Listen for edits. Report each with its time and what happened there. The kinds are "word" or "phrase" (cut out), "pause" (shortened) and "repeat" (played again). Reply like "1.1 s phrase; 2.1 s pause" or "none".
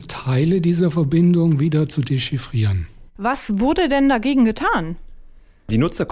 3.1 s pause